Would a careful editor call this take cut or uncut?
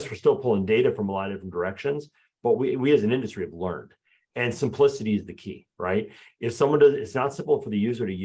uncut